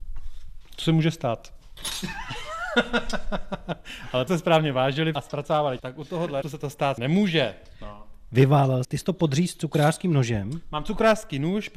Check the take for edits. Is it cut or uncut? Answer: cut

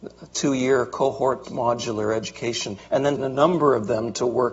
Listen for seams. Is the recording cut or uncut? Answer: cut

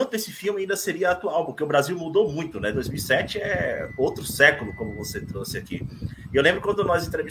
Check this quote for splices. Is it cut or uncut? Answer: uncut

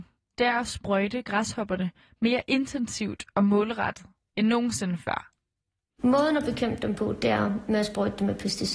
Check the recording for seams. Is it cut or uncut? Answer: uncut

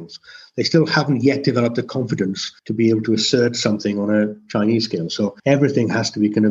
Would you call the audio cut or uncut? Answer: cut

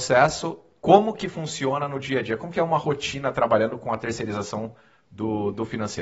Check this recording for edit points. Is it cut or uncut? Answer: uncut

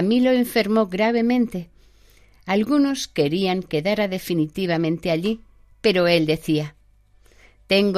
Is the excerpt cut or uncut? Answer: cut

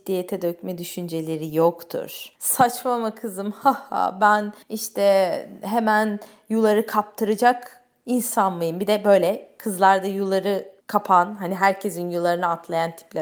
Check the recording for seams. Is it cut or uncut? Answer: cut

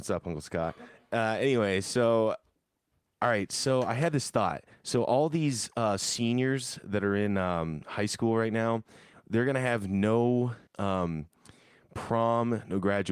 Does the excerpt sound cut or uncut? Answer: cut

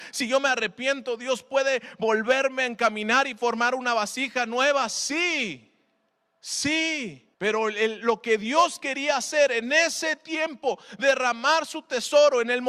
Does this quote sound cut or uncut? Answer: cut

